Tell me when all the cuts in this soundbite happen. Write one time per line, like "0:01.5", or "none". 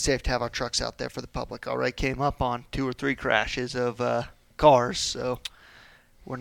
none

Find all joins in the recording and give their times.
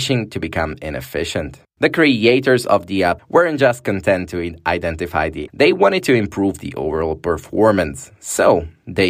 0:03.2
0:05.5

